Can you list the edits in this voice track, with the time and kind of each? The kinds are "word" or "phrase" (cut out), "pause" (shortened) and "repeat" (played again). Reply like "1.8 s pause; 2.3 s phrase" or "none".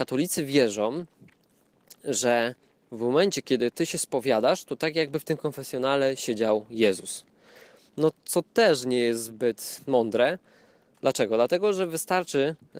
9.8 s word